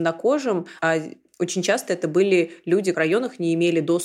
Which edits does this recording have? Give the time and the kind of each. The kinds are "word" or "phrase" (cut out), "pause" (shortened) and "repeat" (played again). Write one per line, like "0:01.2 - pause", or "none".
0:02.9 - phrase